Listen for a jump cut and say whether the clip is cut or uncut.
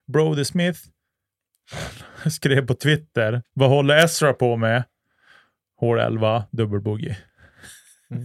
cut